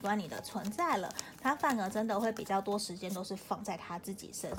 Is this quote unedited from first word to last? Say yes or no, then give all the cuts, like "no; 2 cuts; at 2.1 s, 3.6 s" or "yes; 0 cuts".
yes; 0 cuts